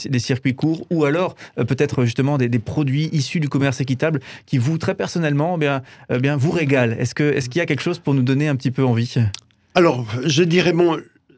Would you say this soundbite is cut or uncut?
uncut